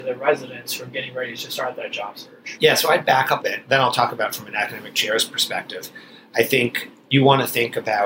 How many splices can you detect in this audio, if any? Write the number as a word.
one